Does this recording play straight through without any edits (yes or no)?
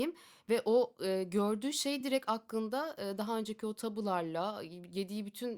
yes